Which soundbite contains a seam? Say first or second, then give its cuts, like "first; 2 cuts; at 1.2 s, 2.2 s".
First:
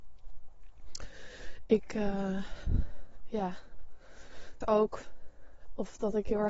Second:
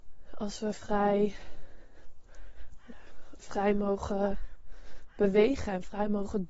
first; 1 cut; at 4.6 s